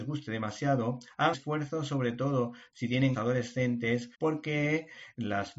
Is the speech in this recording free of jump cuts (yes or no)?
no